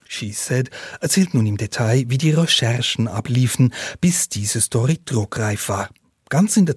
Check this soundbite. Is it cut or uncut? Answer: uncut